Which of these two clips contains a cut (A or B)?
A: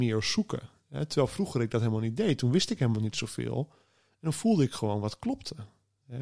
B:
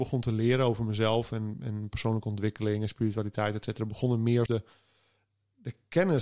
B